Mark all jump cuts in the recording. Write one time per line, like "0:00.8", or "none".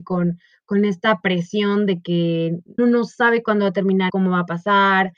0:02.8
0:04.1